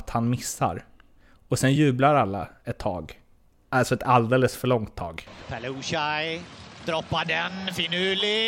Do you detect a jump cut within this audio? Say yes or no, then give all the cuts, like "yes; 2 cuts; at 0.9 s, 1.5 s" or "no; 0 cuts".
no; 0 cuts